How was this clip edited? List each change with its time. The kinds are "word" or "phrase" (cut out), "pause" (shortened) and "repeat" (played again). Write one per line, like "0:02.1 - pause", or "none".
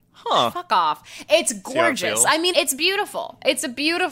0:02.5 - word